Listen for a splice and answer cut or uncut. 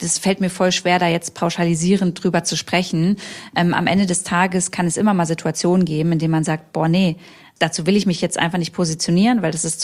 uncut